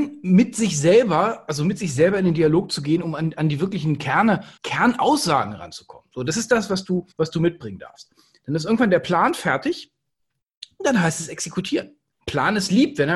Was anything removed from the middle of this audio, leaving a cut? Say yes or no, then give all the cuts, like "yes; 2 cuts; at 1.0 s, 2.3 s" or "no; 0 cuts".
yes; 2 cuts; at 4.6 s, 7.1 s